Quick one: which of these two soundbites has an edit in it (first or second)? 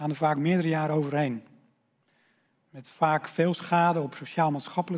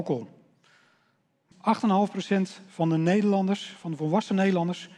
second